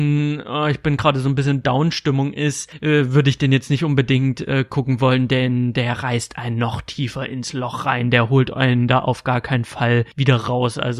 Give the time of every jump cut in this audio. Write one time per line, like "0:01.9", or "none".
none